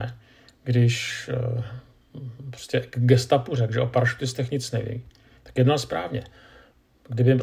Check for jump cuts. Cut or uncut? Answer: uncut